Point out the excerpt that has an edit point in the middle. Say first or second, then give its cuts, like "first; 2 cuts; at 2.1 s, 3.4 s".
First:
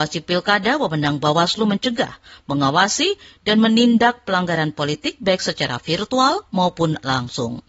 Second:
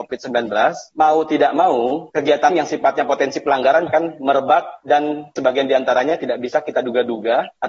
second; 3 cuts; at 2.5 s, 3.9 s, 5.4 s